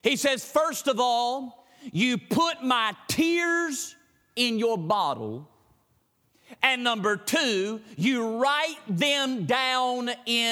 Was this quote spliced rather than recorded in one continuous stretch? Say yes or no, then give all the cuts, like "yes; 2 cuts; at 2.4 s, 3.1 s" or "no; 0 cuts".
no; 0 cuts